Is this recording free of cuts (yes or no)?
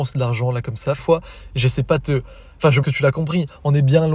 no